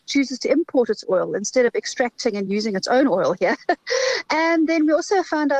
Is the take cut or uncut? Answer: uncut